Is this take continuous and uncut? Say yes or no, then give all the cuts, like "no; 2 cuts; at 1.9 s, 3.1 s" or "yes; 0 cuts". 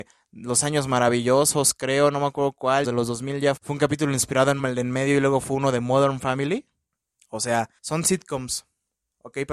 no; 5 cuts; at 2.8 s, 3.6 s, 4.6 s, 6.9 s, 7.8 s